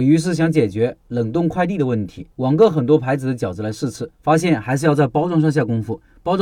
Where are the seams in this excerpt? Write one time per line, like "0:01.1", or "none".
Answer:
0:02.3
0:04.1